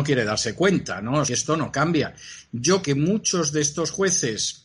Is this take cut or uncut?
cut